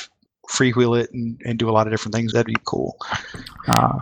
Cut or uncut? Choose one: cut